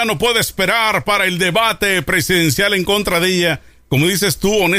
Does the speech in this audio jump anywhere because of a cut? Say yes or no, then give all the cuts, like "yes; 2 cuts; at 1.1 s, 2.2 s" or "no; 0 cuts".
no; 0 cuts